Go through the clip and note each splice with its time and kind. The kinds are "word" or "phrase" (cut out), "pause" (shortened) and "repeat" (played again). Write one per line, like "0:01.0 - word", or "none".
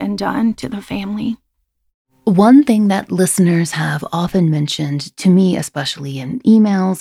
none